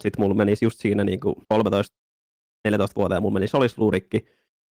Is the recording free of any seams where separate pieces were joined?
no; 1 cut; at 1.4 s

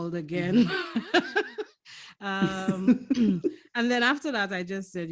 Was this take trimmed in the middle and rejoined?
no; 0 cuts

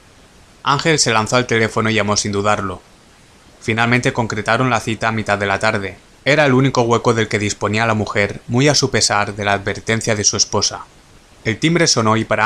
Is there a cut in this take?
no; 0 cuts

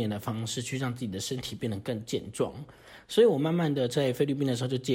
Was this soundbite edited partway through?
no; 0 cuts

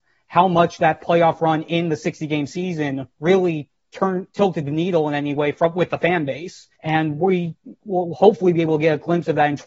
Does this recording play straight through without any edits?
no; 2 cuts; at 3.1 s, 6.7 s

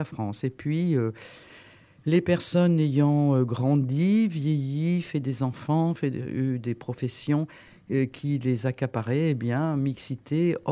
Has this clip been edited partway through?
no; 0 cuts

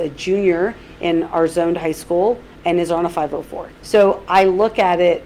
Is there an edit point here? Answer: yes; 1 cut; at 3.8 s

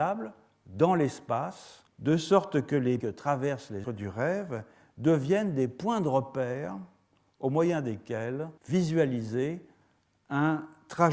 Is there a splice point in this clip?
yes; 4 cuts; at 1.9 s, 3.0 s, 3.8 s, 8.6 s

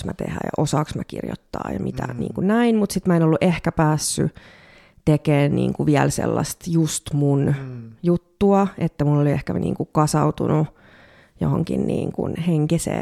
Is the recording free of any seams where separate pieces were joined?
yes; 0 cuts

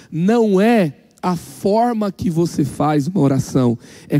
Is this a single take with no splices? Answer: yes; 0 cuts

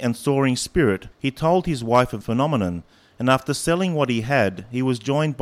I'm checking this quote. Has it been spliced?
yes; 2 cuts; at 1.1 s, 2.2 s

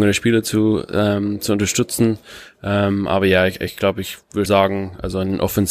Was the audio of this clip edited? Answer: yes; 1 cut; at 4.5 s

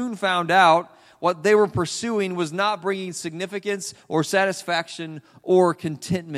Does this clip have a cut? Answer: no; 0 cuts

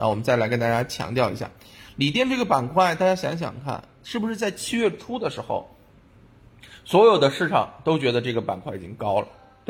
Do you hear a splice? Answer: no; 0 cuts

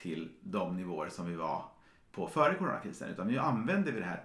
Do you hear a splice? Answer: no; 0 cuts

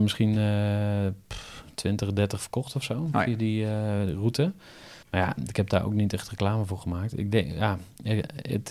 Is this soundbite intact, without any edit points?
no; 1 cut; at 5.0 s

